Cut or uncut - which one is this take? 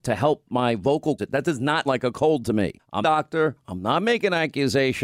cut